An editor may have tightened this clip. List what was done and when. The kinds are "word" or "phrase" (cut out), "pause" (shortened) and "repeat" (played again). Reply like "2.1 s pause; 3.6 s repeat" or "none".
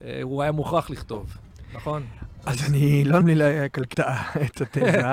3.2 s word; 3.9 s word